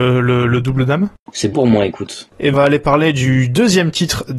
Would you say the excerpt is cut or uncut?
cut